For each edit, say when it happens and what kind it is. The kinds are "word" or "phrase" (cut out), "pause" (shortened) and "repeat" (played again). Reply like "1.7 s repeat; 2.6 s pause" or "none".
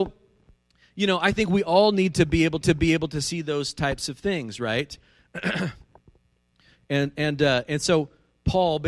2.6 s repeat